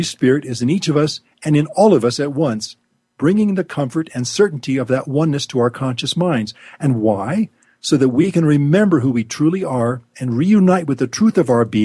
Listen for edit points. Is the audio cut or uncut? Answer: uncut